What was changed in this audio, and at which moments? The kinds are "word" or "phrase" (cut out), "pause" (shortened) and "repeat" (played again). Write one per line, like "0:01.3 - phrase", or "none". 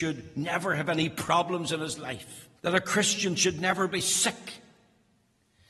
0:02.6 - pause